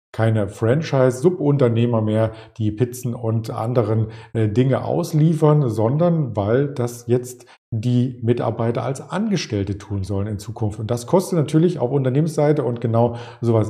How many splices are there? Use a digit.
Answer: 0